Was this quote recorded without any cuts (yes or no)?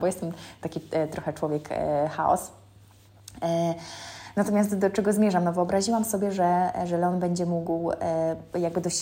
yes